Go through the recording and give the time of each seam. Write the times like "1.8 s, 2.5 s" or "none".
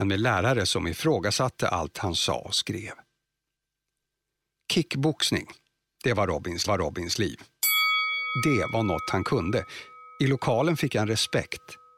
6.7 s